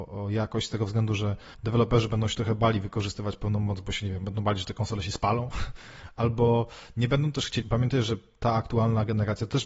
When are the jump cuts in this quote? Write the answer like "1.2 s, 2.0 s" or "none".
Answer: 1.5 s, 7.6 s

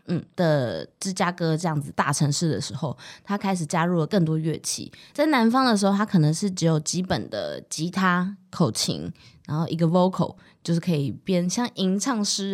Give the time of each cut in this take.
none

